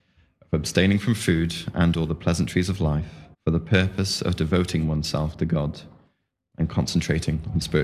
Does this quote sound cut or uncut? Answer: cut